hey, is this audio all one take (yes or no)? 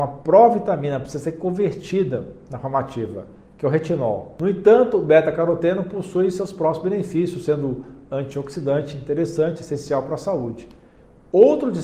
yes